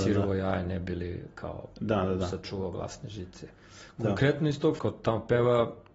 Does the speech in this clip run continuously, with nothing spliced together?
no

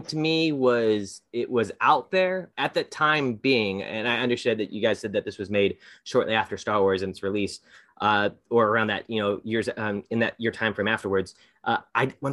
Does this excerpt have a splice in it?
yes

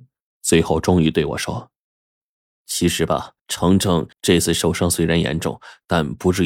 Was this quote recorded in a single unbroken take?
no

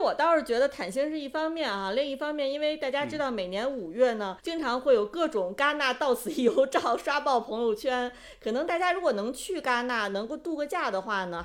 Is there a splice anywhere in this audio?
yes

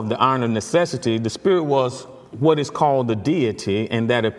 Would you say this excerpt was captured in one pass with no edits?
yes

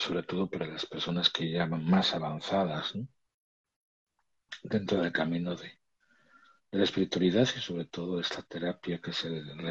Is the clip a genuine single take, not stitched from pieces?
yes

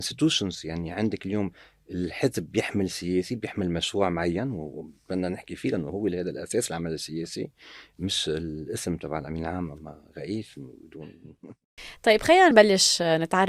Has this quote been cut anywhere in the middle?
no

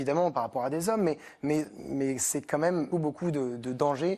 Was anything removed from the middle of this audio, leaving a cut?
yes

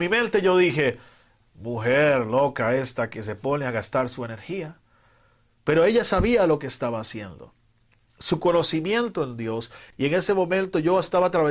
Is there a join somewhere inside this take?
no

